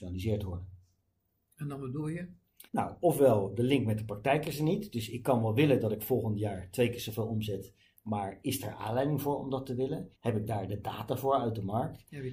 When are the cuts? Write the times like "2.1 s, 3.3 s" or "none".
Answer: 2.7 s, 10.1 s